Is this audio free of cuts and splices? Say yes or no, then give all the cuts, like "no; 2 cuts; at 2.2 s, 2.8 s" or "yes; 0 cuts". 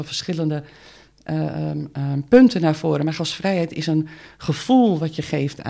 yes; 0 cuts